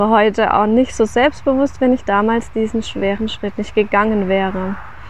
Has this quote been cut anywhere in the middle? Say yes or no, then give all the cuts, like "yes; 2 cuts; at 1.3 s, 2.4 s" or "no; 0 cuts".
no; 0 cuts